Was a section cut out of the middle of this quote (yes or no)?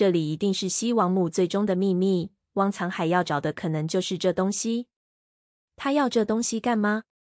no